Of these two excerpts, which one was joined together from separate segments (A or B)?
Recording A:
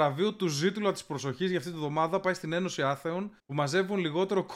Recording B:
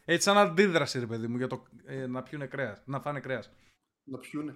A